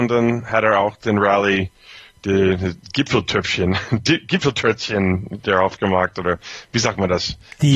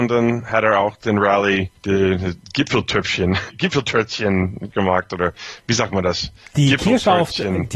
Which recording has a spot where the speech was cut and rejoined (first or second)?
second